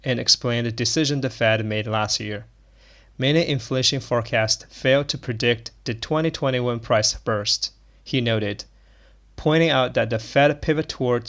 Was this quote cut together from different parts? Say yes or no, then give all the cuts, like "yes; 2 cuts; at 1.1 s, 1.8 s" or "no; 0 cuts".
no; 0 cuts